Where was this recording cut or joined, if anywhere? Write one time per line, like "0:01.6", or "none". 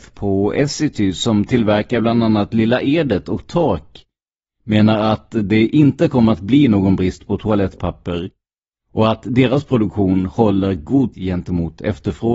0:11.1